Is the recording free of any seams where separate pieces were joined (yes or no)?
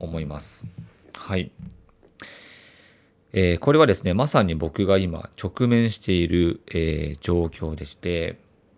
yes